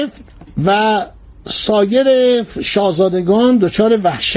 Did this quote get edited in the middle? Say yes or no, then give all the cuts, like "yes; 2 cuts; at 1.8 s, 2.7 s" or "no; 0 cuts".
no; 0 cuts